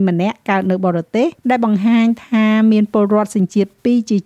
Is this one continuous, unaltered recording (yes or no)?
no